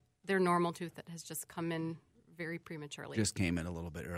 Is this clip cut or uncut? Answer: uncut